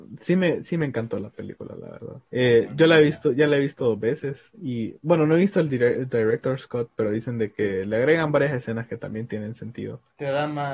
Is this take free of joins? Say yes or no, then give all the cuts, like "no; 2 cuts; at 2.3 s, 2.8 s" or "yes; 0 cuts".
yes; 0 cuts